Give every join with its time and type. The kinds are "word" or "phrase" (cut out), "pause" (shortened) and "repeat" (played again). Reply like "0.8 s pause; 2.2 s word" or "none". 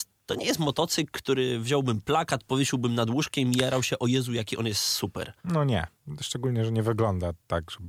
5.4 s pause